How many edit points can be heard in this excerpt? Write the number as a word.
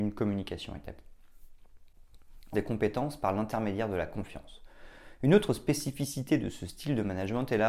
one